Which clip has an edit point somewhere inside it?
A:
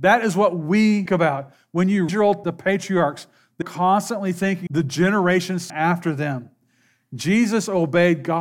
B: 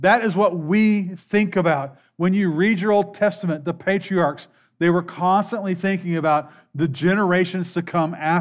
A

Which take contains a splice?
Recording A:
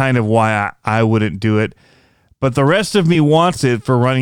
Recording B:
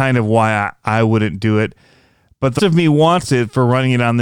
B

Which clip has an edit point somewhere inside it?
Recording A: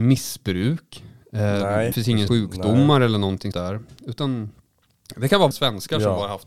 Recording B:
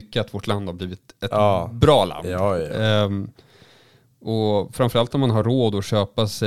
A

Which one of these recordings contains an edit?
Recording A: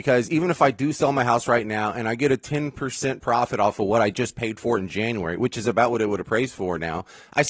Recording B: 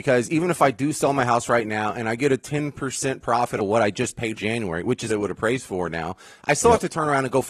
B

